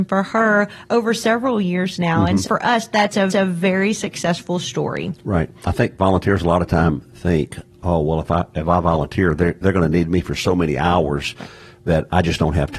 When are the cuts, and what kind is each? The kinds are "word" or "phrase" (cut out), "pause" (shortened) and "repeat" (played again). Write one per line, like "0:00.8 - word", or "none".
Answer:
0:02.4 - word
0:03.3 - repeat